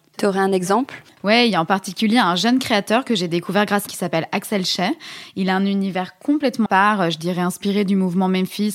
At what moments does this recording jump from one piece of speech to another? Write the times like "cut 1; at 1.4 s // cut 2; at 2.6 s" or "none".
cut 1; at 3.9 s // cut 2; at 6.7 s